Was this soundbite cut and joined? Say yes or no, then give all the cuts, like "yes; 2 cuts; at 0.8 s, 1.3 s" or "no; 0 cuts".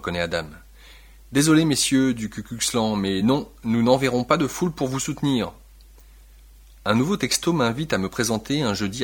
no; 0 cuts